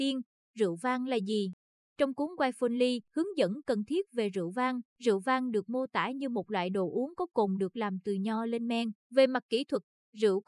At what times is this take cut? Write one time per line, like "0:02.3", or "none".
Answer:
0:03.1
0:04.9
0:09.0

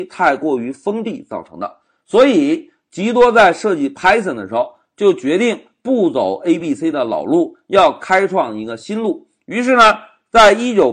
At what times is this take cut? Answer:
none

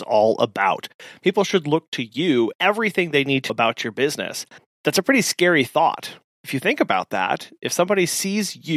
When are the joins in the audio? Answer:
0:02.5
0:03.5
0:04.6

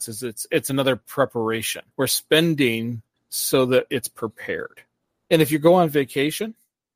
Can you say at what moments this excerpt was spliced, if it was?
0:01.9

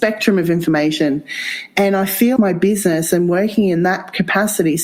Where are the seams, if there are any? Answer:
0:02.4

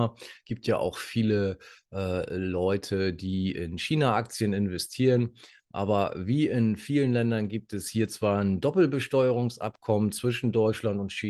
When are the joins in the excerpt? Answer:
none

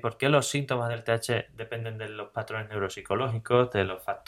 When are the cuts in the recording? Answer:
none

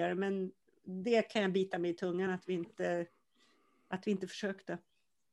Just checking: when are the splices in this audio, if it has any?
none

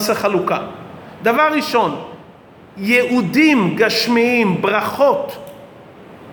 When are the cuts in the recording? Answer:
none

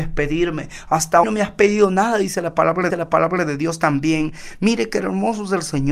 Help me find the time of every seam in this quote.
0:01.2
0:02.9

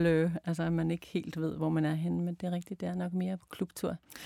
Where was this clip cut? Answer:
none

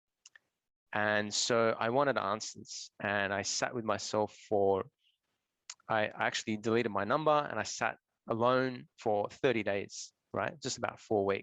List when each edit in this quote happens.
0:05.8
0:08.9

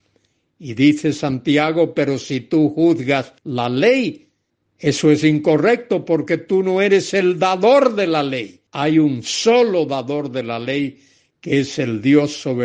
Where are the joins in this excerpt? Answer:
0:03.4
0:04.5
0:08.7

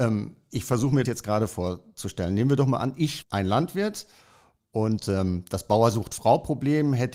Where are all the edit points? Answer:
0:01.0
0:03.2

